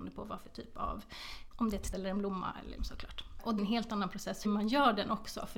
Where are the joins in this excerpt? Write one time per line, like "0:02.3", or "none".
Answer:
0:01.5
0:01.9
0:02.8
0:03.6
0:04.4